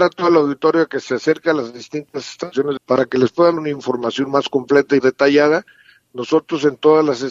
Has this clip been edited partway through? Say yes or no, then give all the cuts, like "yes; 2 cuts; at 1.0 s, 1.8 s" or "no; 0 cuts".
yes; 3 cuts; at 2.8 s, 3.6 s, 5.0 s